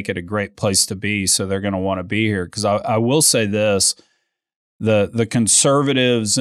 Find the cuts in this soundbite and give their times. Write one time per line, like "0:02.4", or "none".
none